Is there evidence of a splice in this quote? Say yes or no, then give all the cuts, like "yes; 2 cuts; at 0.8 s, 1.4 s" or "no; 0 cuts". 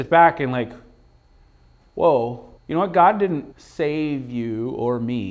yes; 2 cuts; at 2.6 s, 3.5 s